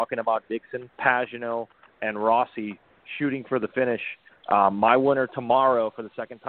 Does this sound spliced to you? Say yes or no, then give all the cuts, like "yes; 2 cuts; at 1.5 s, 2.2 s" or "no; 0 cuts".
yes; 1 cut; at 0.9 s